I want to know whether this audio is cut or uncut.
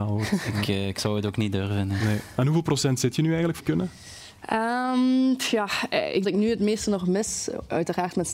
cut